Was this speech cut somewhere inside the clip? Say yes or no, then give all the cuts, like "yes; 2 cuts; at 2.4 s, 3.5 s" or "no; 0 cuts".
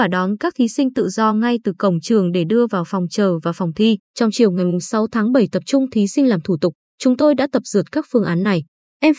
yes; 1 cut; at 4.0 s